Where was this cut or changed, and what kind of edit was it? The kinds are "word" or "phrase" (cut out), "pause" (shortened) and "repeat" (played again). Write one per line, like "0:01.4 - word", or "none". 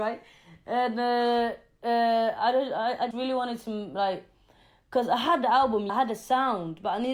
0:03.1 - word
0:05.9 - word